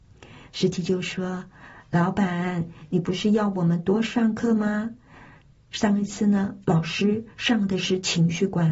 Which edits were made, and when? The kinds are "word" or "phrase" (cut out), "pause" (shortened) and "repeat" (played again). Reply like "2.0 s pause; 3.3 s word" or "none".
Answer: none